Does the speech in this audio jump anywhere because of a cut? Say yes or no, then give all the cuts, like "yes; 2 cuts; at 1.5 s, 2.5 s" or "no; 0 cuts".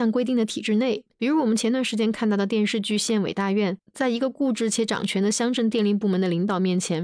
yes; 2 cuts; at 1.1 s, 3.9 s